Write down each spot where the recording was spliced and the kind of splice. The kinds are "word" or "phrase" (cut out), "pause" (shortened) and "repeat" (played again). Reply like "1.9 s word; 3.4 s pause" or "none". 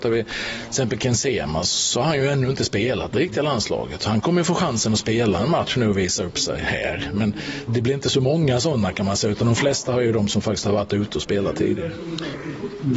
7.7 s word